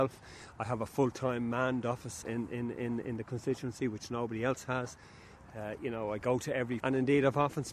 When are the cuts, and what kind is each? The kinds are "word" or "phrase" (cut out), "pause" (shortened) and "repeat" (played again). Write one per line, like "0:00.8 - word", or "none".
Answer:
0:02.2 - word
0:06.8 - word

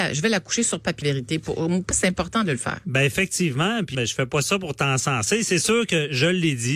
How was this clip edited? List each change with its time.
0:01.0 - word
0:01.9 - word
0:03.9 - word

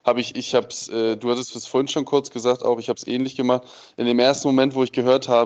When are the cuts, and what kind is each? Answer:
none

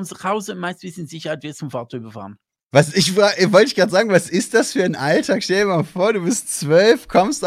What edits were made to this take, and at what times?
none

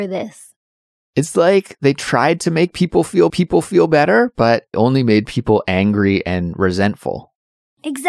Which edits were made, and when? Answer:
0:03.3 - repeat
0:04.7 - phrase

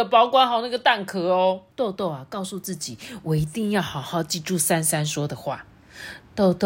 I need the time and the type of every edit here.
0:01.7 - pause

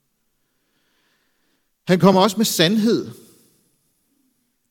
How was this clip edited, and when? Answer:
none

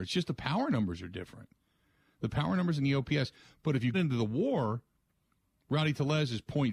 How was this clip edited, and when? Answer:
0:03.9 - word

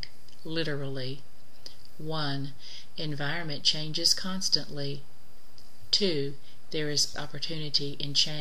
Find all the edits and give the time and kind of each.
0:07.1 - word

